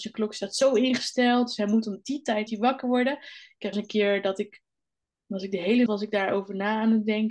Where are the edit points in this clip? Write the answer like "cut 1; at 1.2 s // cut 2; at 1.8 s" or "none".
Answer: cut 1; at 2.5 s // cut 2; at 3.7 s // cut 3; at 5.9 s